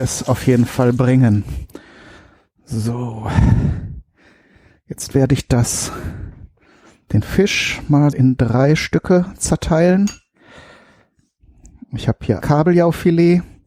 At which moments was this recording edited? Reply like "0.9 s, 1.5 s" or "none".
8.1 s, 12.4 s